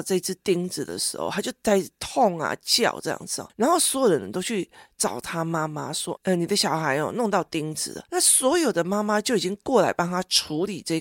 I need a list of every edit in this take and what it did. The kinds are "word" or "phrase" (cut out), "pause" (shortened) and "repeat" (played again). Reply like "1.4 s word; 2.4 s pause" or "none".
none